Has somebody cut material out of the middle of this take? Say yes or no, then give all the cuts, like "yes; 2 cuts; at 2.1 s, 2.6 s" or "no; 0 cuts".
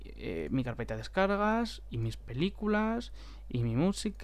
no; 0 cuts